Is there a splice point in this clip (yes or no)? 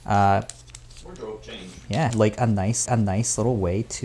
yes